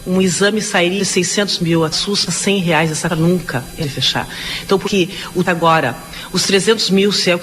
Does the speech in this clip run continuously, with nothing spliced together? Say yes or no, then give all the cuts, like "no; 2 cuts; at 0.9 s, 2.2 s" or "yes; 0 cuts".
no; 7 cuts; at 1.0 s, 1.9 s, 2.3 s, 3.1 s, 3.8 s, 4.8 s, 5.4 s